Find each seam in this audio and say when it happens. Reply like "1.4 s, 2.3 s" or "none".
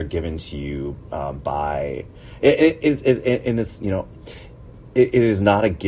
none